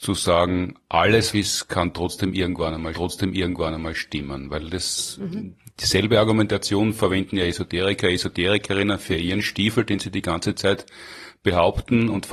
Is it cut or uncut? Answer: cut